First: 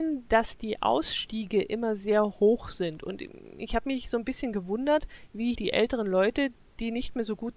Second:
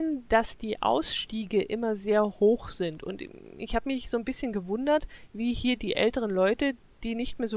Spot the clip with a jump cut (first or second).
first